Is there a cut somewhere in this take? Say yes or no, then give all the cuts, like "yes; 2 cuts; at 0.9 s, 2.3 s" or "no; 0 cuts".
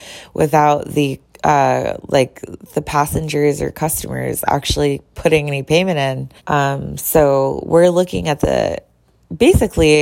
yes; 1 cut; at 6.4 s